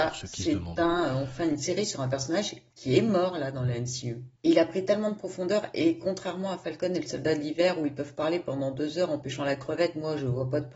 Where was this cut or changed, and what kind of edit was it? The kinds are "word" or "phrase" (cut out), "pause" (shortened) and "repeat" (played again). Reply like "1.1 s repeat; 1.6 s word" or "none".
2.7 s pause; 4.4 s pause